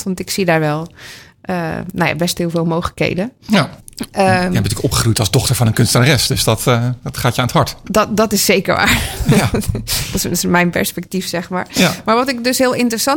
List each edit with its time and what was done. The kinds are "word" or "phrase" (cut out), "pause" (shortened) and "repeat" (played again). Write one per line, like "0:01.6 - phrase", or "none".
0:03.8 - pause

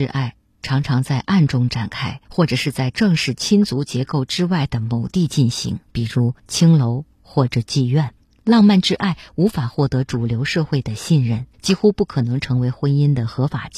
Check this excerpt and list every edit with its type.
0:02.2 - pause
0:05.9 - pause
0:06.4 - pause
0:08.2 - pause
0:11.5 - pause

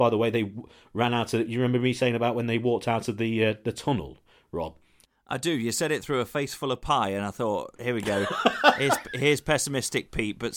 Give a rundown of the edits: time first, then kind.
none

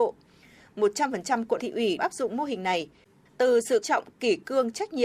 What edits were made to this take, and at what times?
0:01.6 - word
0:02.0 - word
0:03.8 - word

